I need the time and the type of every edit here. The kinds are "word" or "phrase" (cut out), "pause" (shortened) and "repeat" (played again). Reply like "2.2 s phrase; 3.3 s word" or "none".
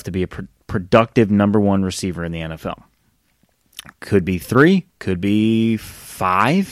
none